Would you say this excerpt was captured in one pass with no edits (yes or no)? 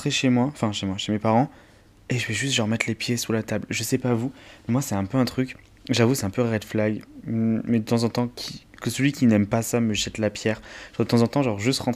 yes